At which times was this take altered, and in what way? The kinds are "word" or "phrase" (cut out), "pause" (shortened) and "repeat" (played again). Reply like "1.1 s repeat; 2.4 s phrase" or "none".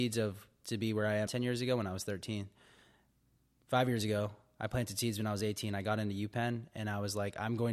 1.3 s word